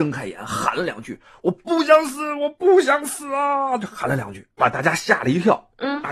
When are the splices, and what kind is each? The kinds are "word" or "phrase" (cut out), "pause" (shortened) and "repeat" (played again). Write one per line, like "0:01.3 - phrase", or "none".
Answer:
0:04.6 - phrase